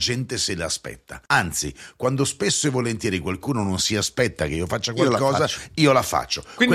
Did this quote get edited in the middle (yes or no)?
yes